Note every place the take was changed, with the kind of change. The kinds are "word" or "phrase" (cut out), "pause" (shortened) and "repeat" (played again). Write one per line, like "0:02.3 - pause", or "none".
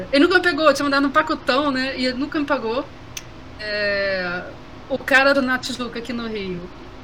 0:05.3 - phrase